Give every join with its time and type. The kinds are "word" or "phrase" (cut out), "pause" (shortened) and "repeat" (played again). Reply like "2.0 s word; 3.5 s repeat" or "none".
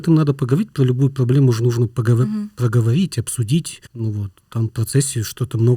3.9 s pause